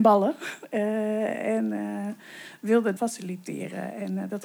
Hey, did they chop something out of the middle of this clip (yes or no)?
yes